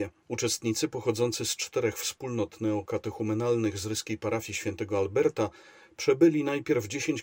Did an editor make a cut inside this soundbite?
no; 0 cuts

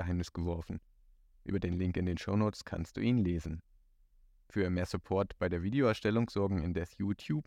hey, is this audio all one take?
yes; 0 cuts

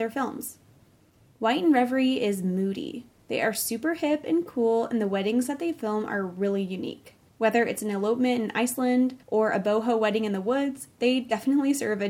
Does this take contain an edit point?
yes; 2 cuts; at 7.3 s, 9.2 s

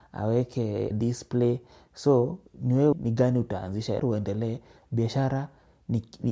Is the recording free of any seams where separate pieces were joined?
no; 4 cuts; at 0.9 s, 2.5 s, 2.9 s, 4.0 s

